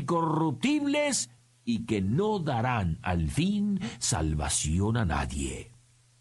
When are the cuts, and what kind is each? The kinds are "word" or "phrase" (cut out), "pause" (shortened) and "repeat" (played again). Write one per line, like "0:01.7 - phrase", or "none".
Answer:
none